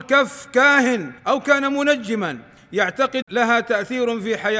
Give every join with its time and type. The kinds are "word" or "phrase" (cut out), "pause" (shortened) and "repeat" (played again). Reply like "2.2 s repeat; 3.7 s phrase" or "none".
1.2 s pause; 3.2 s phrase